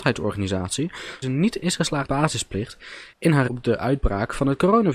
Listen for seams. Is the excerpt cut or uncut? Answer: cut